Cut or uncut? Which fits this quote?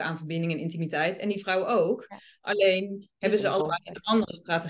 uncut